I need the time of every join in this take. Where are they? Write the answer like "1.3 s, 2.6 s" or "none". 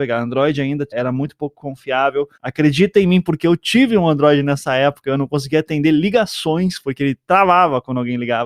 2.3 s